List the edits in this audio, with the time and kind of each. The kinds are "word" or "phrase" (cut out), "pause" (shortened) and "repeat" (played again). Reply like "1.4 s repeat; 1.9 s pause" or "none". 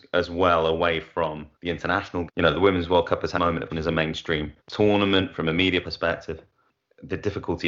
1.5 s pause; 2.3 s phrase; 3.3 s word; 3.7 s word; 4.6 s pause; 5.8 s phrase